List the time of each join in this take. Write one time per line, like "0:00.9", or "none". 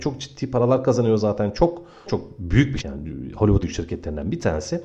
0:02.1
0:02.8
0:03.6